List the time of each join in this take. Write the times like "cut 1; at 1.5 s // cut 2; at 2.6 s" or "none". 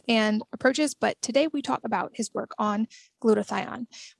cut 1; at 1.8 s